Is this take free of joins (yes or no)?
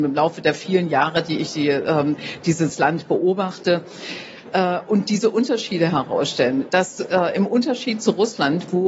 yes